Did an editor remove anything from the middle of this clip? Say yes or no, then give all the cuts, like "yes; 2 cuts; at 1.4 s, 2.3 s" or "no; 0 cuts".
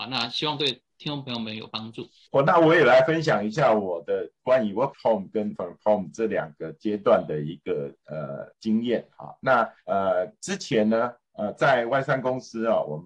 yes; 4 cuts; at 4.9 s, 5.6 s, 8.5 s, 9.8 s